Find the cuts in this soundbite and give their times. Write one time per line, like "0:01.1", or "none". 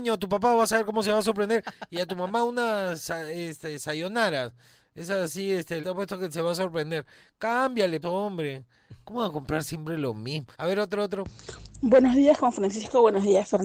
0:05.8
0:08.0
0:10.5